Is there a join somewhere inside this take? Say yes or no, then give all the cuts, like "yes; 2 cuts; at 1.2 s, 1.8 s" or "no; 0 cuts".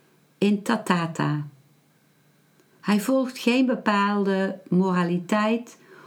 no; 0 cuts